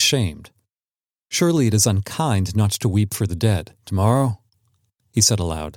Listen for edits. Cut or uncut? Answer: cut